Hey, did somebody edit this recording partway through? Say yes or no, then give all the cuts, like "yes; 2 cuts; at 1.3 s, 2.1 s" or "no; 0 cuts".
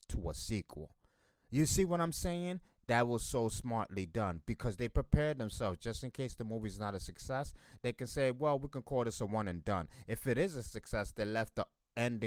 no; 0 cuts